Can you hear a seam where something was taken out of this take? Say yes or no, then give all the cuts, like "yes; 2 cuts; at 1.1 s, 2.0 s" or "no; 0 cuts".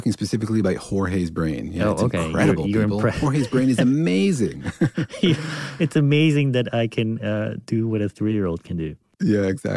no; 0 cuts